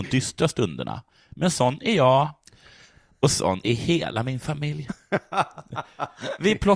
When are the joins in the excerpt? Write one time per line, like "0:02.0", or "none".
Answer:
none